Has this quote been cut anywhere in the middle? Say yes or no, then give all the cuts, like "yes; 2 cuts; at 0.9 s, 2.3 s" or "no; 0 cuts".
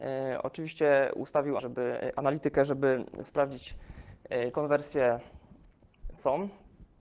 yes; 2 cuts; at 1.6 s, 4.5 s